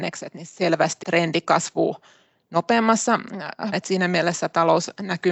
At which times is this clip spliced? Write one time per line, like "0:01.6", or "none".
0:01.0
0:03.7